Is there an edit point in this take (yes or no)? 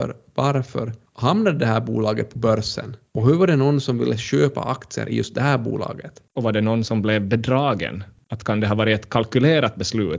no